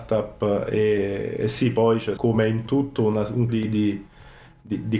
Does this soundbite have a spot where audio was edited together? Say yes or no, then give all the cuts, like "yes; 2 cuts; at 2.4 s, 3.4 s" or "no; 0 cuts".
yes; 2 cuts; at 2.2 s, 3.5 s